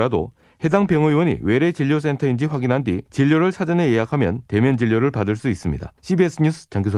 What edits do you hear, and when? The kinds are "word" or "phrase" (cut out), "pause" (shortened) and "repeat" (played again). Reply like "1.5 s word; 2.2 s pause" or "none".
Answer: 3.1 s pause; 4.4 s pause; 6.0 s pause